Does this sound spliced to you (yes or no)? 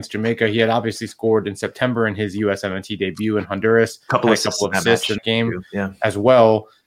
yes